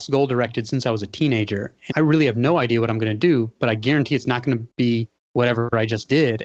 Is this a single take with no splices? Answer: no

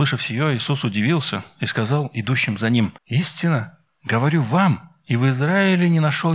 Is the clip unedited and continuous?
no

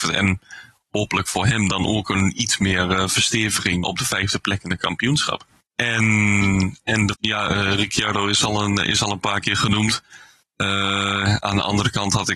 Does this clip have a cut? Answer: yes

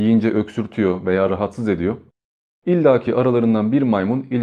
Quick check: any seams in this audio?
no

